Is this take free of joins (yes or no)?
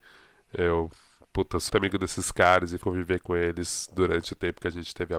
no